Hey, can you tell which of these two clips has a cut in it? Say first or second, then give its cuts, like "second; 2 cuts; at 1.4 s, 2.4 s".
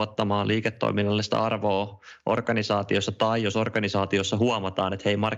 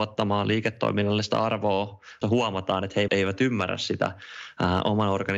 second; 2 cuts; at 2.2 s, 3.1 s